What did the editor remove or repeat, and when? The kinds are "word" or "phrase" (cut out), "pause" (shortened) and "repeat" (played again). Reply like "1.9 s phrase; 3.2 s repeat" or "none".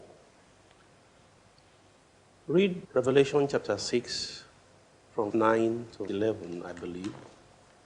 2.8 s pause; 5.3 s word; 6.1 s word